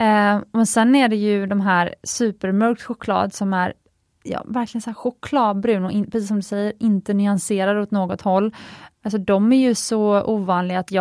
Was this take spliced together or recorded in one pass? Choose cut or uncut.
uncut